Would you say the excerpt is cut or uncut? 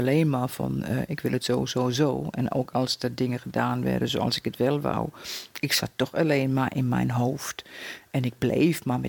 uncut